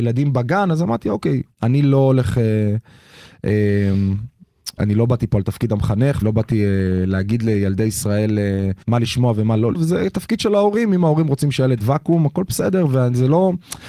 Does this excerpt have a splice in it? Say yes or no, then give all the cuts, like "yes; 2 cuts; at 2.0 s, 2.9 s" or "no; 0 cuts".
yes; 6 cuts; at 1.5 s, 4.8 s, 6.2 s, 8.8 s, 9.7 s, 11.8 s